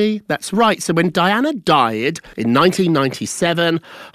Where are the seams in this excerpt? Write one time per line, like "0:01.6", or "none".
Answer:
0:02.3